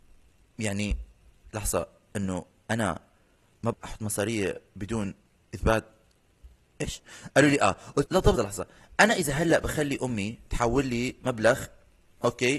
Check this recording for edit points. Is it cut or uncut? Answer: cut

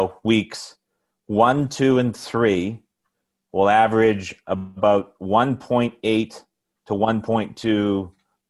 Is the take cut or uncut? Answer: uncut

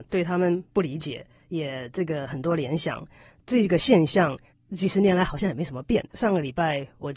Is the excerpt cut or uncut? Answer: cut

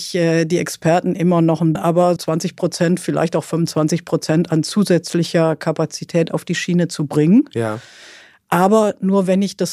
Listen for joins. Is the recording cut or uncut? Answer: cut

